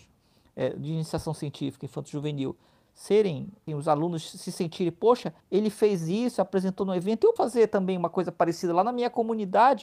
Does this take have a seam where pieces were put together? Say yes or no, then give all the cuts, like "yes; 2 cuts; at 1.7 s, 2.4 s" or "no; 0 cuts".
yes; 3 cuts; at 3.7 s, 5.4 s, 7.4 s